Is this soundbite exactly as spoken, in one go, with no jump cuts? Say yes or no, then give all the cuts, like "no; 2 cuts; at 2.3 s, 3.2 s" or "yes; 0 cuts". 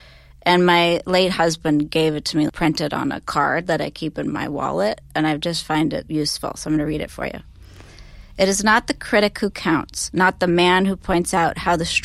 no; 2 cuts; at 2.5 s, 6.1 s